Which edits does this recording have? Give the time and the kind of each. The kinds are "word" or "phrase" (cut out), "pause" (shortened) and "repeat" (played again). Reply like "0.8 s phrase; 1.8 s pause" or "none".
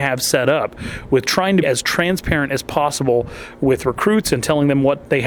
1.6 s word